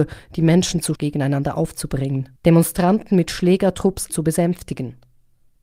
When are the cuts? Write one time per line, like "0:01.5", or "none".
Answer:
0:01.0
0:02.4
0:04.1